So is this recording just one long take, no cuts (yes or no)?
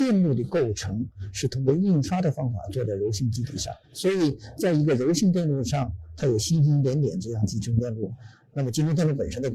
no